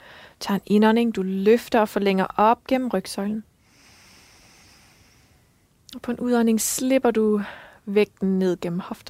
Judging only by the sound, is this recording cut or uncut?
uncut